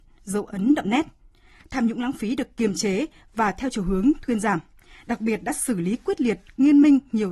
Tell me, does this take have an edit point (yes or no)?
no